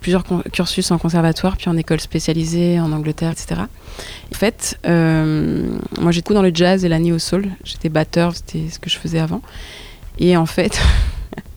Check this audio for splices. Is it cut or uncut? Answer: cut